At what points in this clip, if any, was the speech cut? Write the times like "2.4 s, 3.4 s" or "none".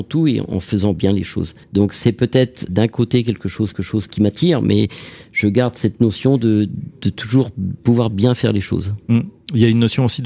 1.6 s, 2.7 s, 3.7 s